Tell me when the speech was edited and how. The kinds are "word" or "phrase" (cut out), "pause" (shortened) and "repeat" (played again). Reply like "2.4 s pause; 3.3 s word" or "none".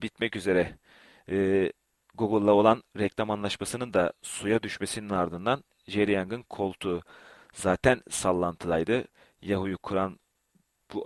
none